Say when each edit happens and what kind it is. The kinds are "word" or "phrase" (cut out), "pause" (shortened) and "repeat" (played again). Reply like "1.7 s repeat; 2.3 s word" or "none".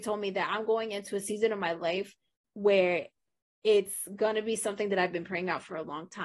none